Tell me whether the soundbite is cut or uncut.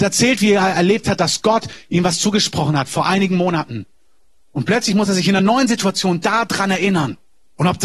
uncut